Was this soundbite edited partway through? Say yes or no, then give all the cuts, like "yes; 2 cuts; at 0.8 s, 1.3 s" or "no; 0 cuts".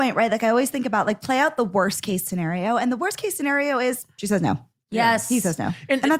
no; 0 cuts